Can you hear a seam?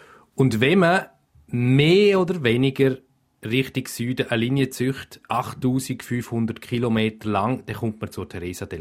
no; 0 cuts

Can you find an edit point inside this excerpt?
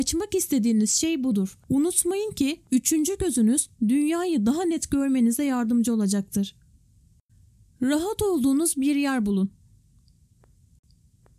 yes; 1 cut; at 7.3 s

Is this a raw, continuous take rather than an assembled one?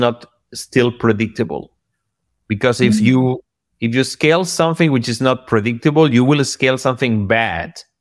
yes; 0 cuts

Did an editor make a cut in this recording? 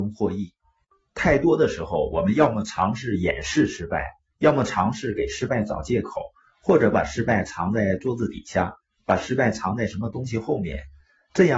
no; 0 cuts

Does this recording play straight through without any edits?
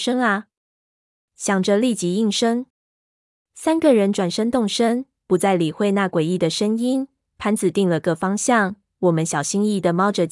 yes; 0 cuts

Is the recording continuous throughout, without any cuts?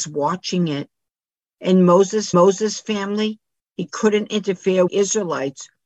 no; 2 cuts; at 2.3 s, 4.9 s

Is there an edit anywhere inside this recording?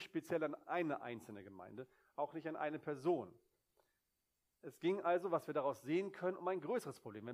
no; 0 cuts

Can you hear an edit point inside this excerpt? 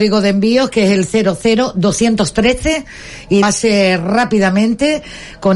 yes; 1 cut; at 3.4 s

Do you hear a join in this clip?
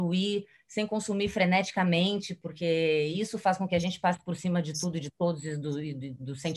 no; 0 cuts

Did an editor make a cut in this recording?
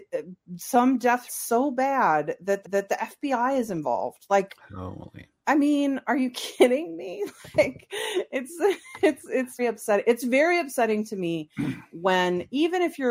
yes; 3 cuts; at 1.3 s, 2.6 s, 9.6 s

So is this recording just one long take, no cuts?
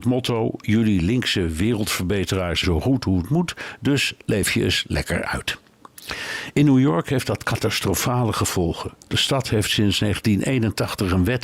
no; 1 cut; at 2.6 s

